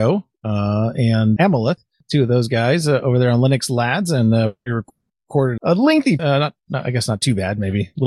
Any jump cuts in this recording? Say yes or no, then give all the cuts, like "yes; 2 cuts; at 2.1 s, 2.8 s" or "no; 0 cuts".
yes; 3 cuts; at 1.4 s, 5.6 s, 6.2 s